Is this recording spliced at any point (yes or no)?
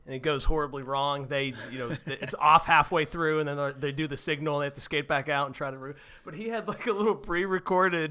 no